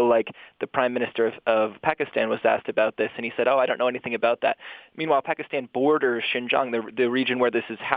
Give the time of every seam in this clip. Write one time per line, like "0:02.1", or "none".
0:01.8